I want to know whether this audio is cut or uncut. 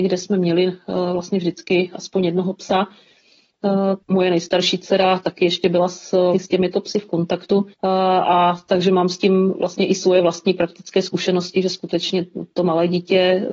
cut